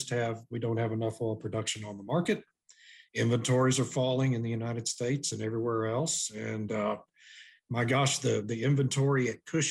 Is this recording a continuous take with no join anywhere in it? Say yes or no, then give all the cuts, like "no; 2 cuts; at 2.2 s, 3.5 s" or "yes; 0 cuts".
yes; 0 cuts